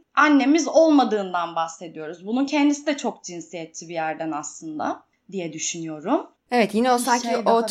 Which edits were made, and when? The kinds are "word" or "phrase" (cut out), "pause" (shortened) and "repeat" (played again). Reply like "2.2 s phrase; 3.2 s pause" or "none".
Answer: none